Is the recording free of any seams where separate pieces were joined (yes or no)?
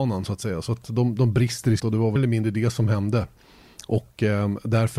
no